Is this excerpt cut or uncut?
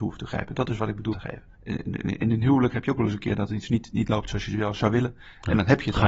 cut